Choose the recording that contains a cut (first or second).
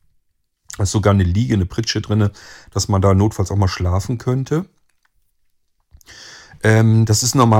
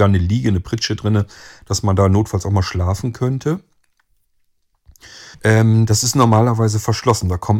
second